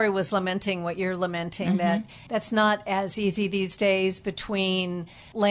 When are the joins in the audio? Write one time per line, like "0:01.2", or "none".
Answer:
none